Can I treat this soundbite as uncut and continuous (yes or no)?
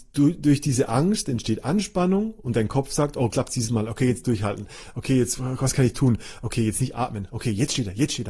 no